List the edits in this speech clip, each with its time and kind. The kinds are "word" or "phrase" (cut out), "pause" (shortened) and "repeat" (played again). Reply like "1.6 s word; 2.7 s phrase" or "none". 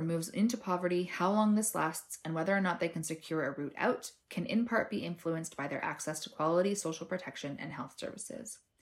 none